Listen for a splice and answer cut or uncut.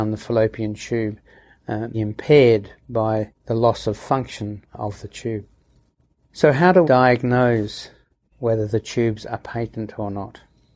cut